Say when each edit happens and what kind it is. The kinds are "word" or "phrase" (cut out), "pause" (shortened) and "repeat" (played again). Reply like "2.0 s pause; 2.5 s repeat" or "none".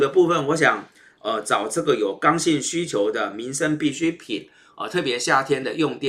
none